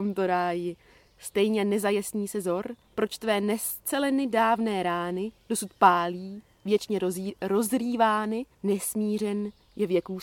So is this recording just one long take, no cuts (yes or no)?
no